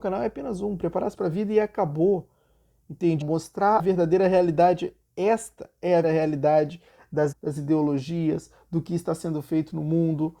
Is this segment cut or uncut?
cut